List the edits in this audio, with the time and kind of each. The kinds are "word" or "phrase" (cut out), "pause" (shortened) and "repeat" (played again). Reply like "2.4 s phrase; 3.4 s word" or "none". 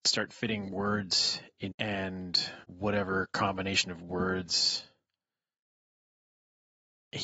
1.7 s phrase; 2.6 s pause

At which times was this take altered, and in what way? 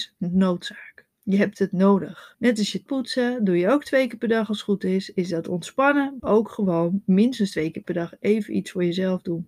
1.1 s pause; 2.3 s pause; 2.9 s word; 6.2 s phrase

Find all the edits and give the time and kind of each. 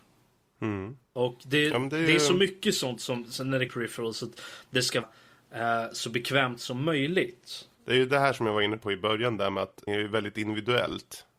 1.0 s pause; 3.7 s phrase; 5.0 s word; 7.7 s pause; 9.9 s word

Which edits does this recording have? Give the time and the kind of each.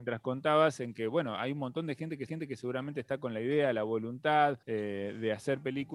2.3 s repeat; 4.6 s pause

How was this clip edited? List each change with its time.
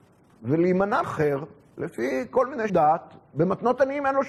1.0 s phrase; 2.7 s word

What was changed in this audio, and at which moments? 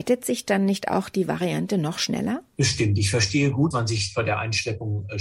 3.7 s word

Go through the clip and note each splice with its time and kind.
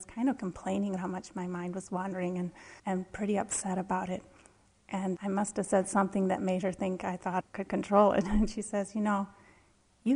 1.0 s word; 2.8 s pause; 5.2 s word; 7.4 s word

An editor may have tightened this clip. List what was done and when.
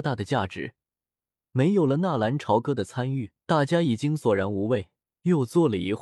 3.4 s pause; 5.0 s pause

